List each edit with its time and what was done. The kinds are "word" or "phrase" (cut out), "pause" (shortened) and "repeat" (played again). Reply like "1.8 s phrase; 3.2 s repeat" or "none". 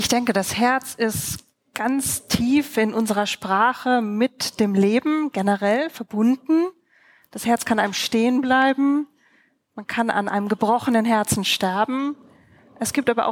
none